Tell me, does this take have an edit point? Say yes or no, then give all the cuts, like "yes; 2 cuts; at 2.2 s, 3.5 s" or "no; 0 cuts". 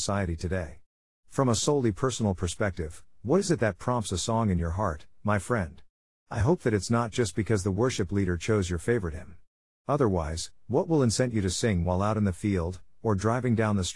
no; 0 cuts